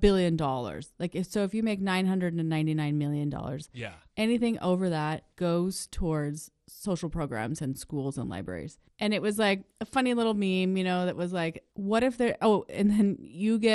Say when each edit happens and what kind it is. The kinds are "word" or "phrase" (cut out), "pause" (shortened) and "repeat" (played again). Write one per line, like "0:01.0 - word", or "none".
0:05.3 - pause
0:08.8 - pause
0:09.7 - pause
0:11.7 - pause